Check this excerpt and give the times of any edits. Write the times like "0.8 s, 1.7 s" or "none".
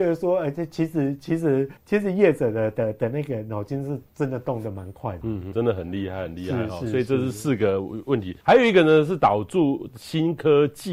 1.8 s, 4.1 s, 5.2 s, 5.5 s, 8.4 s